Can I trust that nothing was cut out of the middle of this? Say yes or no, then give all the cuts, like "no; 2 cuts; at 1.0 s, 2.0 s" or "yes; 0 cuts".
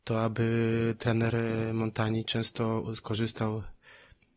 yes; 0 cuts